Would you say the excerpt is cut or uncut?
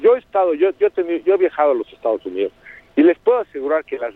uncut